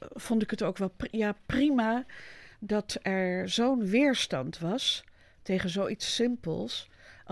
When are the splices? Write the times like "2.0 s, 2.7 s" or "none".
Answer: none